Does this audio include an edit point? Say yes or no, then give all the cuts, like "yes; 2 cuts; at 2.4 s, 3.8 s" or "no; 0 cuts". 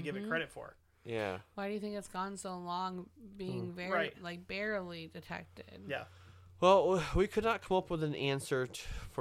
no; 0 cuts